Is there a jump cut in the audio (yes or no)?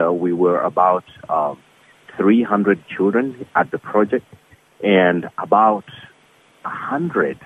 no